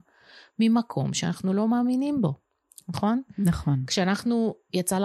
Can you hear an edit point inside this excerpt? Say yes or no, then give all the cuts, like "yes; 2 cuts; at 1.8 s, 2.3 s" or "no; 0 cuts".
no; 0 cuts